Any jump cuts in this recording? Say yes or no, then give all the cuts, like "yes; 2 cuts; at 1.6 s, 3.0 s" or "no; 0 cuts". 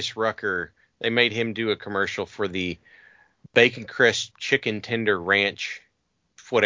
no; 0 cuts